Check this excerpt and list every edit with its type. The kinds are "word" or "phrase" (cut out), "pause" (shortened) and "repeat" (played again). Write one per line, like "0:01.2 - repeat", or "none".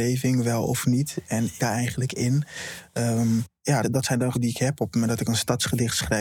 0:01.6 - phrase
0:03.8 - word
0:04.3 - word